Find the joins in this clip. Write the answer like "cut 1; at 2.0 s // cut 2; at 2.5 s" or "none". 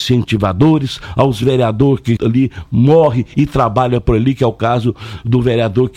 cut 1; at 2.2 s